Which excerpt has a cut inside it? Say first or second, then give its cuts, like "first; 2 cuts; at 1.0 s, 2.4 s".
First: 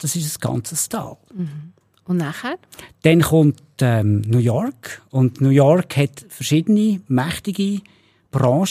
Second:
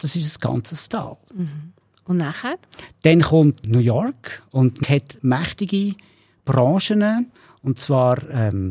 second; 3 cuts; at 3.6 s, 4.8 s, 5.2 s